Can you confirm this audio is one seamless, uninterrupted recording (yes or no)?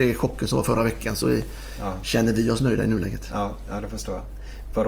yes